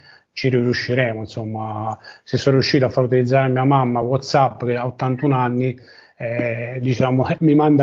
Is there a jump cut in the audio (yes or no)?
no